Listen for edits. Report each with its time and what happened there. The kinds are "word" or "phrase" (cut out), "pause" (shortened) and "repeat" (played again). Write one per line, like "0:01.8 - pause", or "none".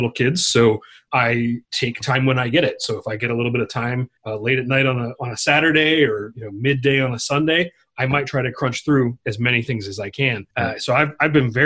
0:04.2 - pause
0:09.2 - pause
0:10.5 - pause